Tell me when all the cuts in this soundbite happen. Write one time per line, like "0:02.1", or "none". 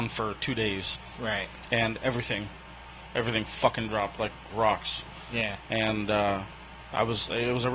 0:04.5